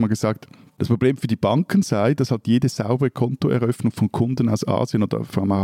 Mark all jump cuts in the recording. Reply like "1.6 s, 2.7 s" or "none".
none